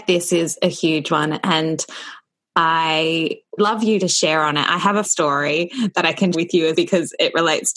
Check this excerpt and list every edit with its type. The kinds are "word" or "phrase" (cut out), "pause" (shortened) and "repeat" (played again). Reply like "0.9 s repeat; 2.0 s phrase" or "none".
3.6 s word; 5.0 s word; 6.3 s word; 6.7 s word